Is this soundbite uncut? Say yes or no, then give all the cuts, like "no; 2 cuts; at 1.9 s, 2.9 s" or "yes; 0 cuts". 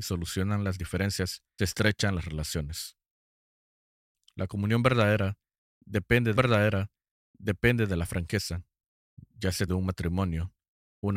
no; 3 cuts; at 1.6 s, 6.4 s, 9.7 s